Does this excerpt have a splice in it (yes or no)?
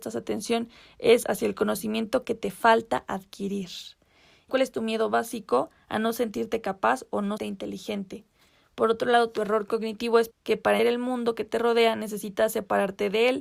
yes